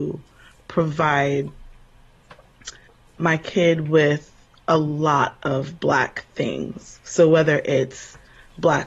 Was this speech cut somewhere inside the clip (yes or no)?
no